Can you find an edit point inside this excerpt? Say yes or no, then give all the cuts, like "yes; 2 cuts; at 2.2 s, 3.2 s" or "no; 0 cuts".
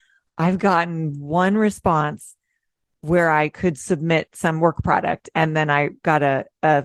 no; 0 cuts